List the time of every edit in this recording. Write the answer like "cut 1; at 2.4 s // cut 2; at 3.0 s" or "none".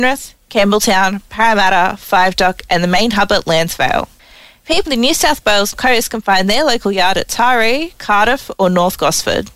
cut 1; at 4.9 s // cut 2; at 5.7 s